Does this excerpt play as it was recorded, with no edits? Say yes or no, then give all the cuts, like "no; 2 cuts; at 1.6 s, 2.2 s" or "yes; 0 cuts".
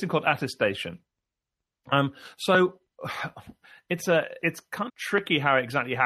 no; 2 cuts; at 4.4 s, 4.9 s